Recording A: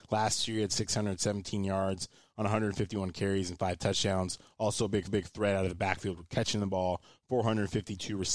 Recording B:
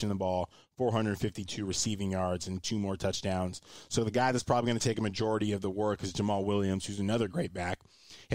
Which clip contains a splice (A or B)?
A